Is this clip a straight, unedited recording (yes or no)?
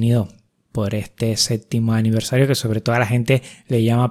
yes